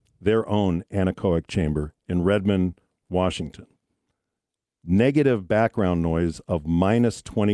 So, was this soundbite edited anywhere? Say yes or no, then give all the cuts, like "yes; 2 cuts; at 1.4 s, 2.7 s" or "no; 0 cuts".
no; 0 cuts